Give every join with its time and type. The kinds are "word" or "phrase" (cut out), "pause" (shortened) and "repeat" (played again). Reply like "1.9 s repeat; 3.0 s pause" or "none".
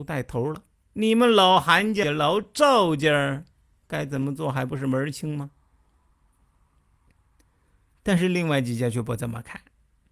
2.0 s phrase; 3.7 s word

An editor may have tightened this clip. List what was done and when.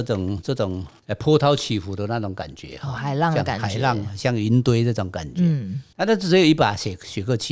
none

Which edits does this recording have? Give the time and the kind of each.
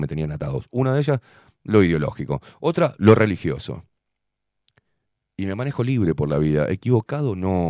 none

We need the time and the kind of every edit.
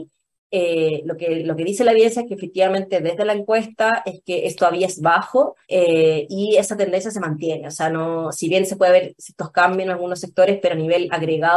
5.6 s pause

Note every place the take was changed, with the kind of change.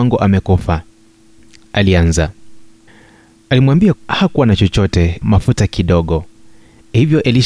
4.0 s word; 5.2 s word

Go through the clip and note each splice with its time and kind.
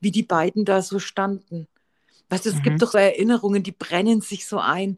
2.9 s word

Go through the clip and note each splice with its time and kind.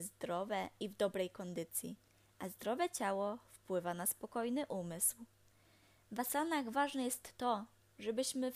none

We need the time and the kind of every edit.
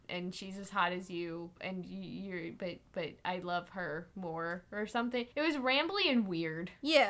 1.6 s pause; 5.3 s pause

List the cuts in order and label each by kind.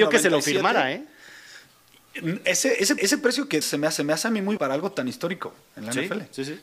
3.0 s repeat; 3.6 s word; 4.0 s repeat; 4.6 s word

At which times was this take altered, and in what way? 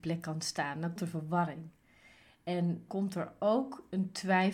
1.0 s word; 2.9 s word

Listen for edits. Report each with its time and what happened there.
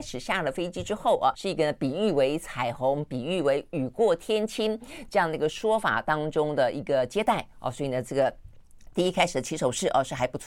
1.3 s word

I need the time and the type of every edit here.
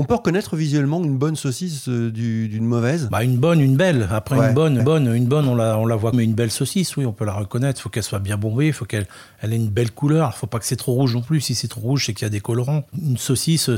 4.8 s repeat; 6.1 s phrase

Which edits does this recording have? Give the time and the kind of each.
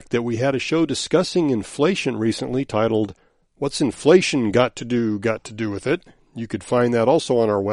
none

